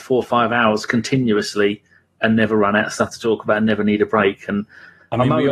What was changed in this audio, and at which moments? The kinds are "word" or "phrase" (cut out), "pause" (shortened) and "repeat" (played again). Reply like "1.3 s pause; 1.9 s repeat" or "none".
none